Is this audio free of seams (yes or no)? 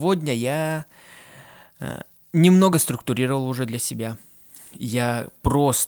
yes